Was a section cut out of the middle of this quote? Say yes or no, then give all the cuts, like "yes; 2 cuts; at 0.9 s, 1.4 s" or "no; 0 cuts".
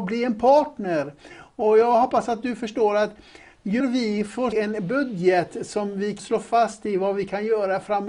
yes; 3 cuts; at 3.8 s, 4.5 s, 6.2 s